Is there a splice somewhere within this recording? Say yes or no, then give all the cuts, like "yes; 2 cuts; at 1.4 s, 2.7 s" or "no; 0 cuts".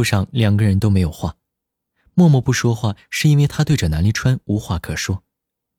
no; 0 cuts